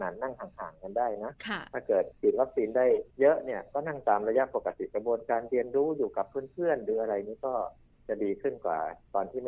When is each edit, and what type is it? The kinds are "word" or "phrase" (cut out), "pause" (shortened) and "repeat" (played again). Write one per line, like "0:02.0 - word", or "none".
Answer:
0:01.4 - pause
0:03.1 - pause

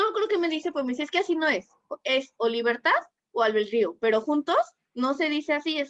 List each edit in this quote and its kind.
none

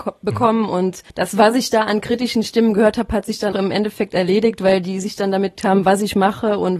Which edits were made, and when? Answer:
0:01.1 - pause
0:03.5 - word
0:05.6 - word

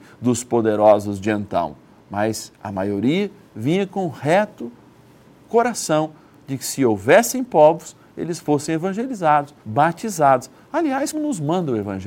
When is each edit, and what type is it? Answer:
0:09.6 - pause
0:11.1 - word

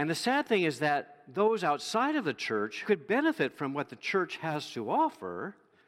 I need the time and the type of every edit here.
0:02.8 - word

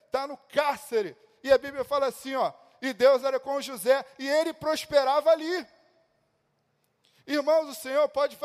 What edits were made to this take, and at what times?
none

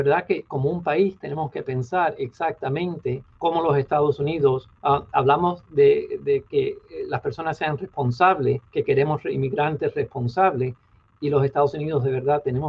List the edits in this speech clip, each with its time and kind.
0:03.3 - pause
0:04.7 - pause
0:08.7 - pause

